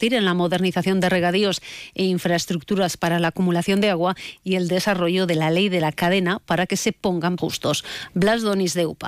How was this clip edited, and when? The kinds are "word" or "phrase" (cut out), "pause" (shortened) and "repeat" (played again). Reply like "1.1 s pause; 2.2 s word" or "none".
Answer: 7.4 s word

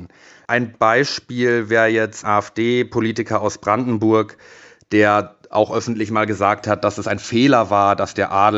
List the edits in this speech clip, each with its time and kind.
2.2 s word

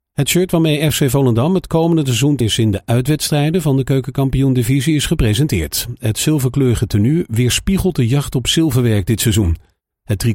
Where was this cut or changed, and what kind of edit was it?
2.4 s word

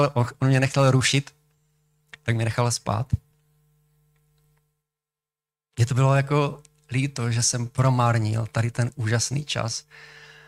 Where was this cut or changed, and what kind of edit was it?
none

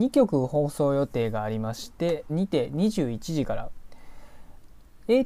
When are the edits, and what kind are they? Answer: 2.3 s phrase

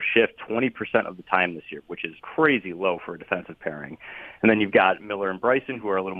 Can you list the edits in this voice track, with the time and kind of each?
2.2 s pause

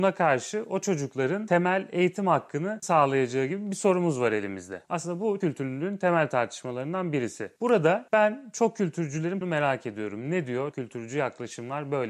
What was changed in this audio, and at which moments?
2.8 s word; 5.4 s word; 9.4 s word; 10.7 s word

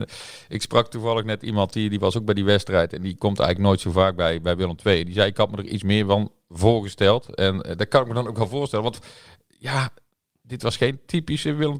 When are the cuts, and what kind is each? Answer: none

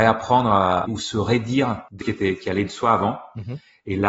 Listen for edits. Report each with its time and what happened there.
2.0 s word

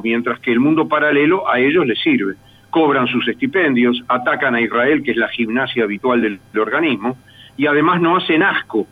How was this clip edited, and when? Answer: none

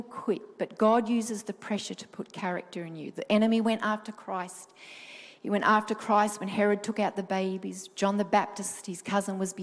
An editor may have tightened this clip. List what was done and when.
none

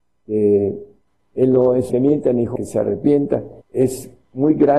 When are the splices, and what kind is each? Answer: 1.9 s phrase; 2.6 s phrase; 3.6 s pause

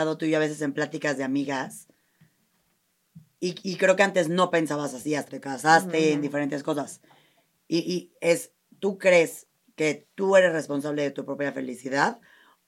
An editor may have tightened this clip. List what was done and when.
5.3 s word

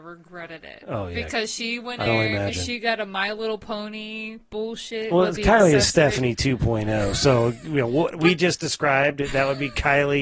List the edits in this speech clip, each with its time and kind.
2.1 s phrase

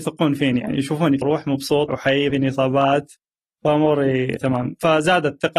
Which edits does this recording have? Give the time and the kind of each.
1.2 s word; 1.9 s word; 2.3 s word; 4.4 s word

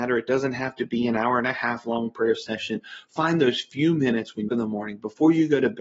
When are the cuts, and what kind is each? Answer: 4.5 s phrase

